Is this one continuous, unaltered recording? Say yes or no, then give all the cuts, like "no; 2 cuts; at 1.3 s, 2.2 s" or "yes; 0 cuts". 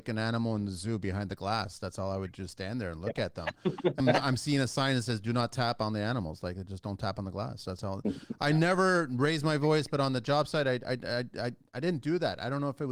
no; 1 cut; at 4.0 s